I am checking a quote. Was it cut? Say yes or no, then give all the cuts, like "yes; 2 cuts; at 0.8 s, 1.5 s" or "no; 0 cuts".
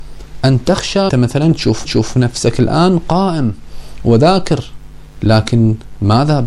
yes; 2 cuts; at 1.1 s, 1.8 s